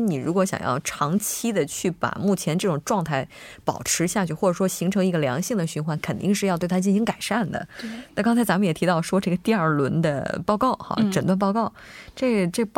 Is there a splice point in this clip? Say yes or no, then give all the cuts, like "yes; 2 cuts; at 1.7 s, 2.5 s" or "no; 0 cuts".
no; 0 cuts